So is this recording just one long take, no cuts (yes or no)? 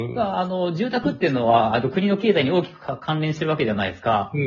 yes